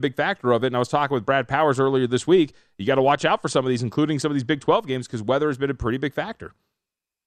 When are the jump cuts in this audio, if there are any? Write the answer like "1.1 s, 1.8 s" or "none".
none